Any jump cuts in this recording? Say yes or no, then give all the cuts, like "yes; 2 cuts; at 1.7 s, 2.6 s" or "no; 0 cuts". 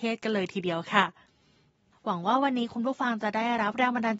no; 0 cuts